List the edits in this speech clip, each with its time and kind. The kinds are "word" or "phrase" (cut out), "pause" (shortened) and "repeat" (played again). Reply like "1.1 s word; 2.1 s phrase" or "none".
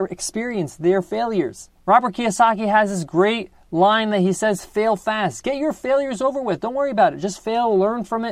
1.8 s pause